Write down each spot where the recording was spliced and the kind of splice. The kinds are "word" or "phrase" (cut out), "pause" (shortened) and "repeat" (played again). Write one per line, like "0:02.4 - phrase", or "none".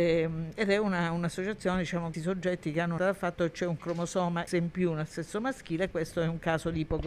0:02.1 - word
0:03.0 - phrase
0:04.5 - word
0:05.9 - word